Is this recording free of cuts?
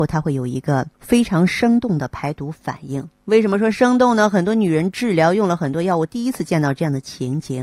no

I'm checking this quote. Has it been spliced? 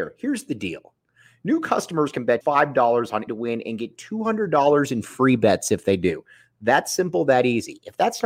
yes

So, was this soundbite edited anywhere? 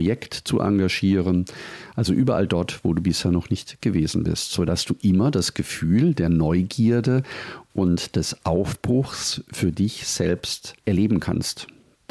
yes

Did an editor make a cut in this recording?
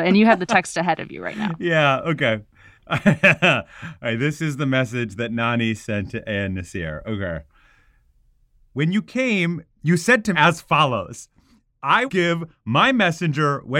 yes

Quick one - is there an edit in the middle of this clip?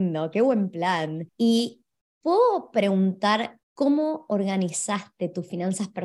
yes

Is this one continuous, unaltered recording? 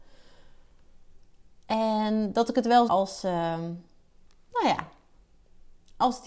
no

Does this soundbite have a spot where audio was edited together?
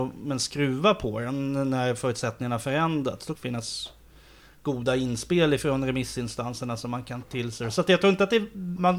yes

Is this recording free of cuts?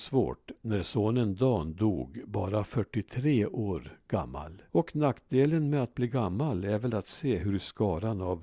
no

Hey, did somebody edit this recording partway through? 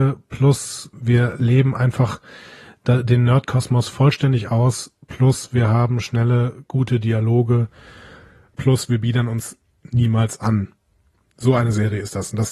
yes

